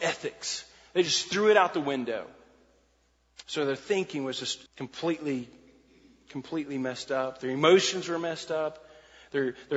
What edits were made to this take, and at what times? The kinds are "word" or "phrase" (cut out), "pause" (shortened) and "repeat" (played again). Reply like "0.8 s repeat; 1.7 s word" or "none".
4.7 s pause